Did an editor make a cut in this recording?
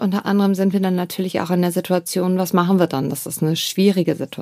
no; 0 cuts

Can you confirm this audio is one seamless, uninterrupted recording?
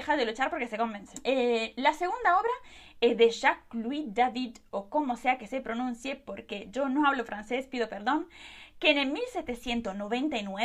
yes; 0 cuts

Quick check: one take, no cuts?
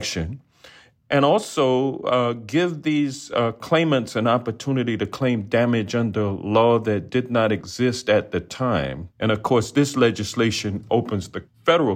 no; 1 cut; at 9.1 s

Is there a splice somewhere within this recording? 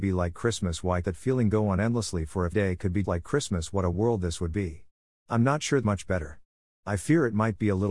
yes; 5 cuts; at 1.0 s, 2.5 s, 3.0 s, 3.9 s, 5.8 s

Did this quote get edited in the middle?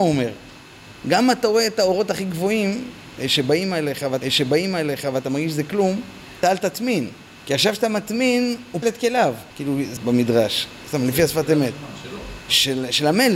yes; 6 cuts; at 4.2 s, 6.4 s, 7.4 s, 8.8 s, 9.5 s, 10.0 s

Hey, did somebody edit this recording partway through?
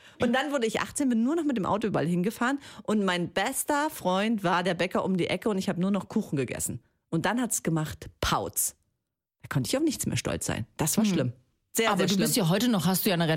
no; 0 cuts

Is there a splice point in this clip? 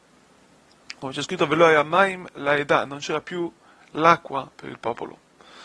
no; 0 cuts

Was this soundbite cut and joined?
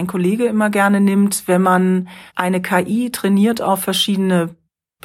yes; 1 cut; at 2.3 s

